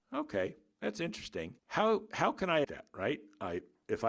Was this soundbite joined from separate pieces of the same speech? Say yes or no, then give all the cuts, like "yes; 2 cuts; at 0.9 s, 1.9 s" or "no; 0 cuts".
yes; 2 cuts; at 1.6 s, 2.6 s